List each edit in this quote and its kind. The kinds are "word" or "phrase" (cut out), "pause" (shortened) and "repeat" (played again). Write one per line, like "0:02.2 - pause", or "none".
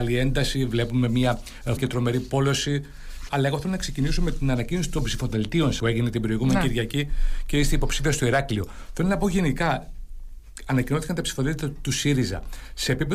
0:01.8 - word
0:03.3 - phrase
0:05.8 - word